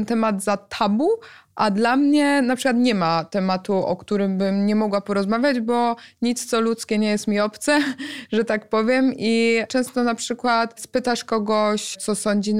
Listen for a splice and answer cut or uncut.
uncut